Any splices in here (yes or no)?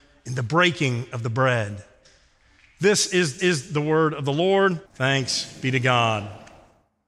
yes